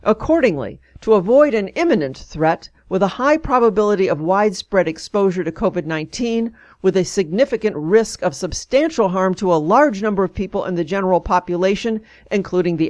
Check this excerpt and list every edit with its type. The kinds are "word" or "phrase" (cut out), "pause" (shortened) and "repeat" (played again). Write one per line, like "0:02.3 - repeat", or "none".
none